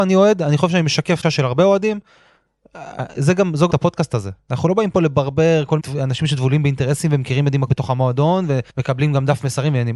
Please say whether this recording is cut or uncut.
cut